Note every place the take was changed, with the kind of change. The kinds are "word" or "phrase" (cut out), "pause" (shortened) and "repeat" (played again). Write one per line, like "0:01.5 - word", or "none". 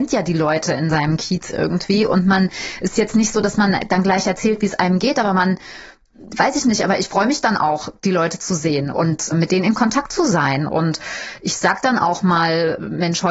none